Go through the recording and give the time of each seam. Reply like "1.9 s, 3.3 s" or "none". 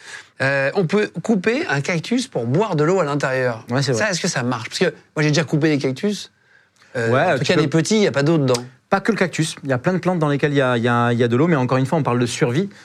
none